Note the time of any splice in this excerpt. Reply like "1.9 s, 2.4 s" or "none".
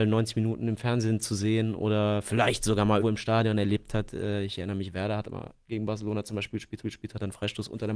3.0 s, 6.8 s